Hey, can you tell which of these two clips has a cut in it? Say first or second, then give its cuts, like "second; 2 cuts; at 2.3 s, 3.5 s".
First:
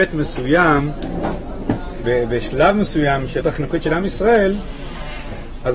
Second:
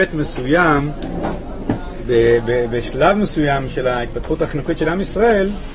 first; 2 cuts; at 2.0 s, 3.4 s